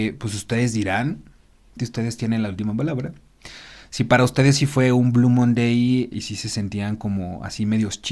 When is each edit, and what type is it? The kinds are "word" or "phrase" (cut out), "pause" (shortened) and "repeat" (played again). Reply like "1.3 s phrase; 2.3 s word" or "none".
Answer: 1.8 s word; 6.1 s word